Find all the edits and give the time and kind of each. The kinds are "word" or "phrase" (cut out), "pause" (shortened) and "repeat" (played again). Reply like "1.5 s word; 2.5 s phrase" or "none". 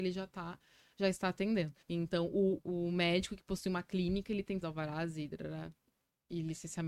1.8 s pause; 2.6 s word; 4.6 s phrase